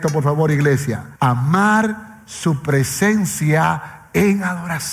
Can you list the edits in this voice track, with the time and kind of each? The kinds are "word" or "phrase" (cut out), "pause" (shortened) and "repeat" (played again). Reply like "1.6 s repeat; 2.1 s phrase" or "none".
1.2 s pause